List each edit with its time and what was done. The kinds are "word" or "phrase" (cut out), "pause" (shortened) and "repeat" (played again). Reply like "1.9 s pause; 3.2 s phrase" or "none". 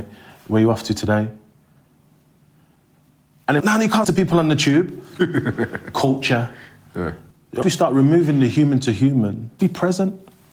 3.6 s word; 4.0 s word; 7.6 s word; 9.6 s word